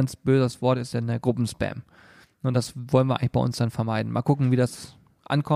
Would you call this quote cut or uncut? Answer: uncut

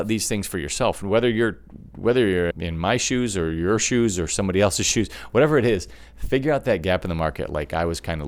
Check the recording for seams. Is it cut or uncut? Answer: cut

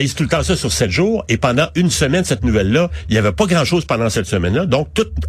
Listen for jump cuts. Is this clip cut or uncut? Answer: uncut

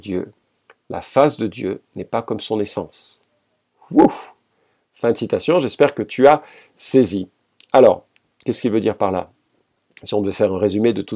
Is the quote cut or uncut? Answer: uncut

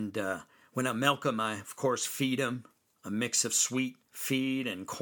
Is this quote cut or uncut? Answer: uncut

